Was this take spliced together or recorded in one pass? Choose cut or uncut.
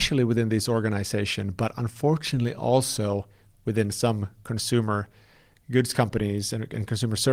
uncut